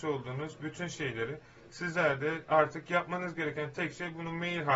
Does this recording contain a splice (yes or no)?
no